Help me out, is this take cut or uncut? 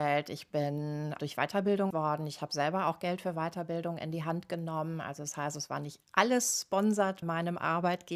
cut